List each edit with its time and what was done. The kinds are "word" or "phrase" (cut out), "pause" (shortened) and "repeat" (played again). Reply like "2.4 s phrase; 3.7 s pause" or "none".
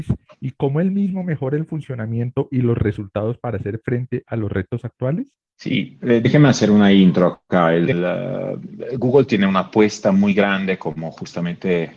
none